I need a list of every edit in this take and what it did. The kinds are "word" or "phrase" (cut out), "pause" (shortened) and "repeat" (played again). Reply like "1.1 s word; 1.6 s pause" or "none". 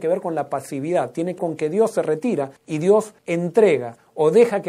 1.4 s word; 2.6 s pause; 3.2 s pause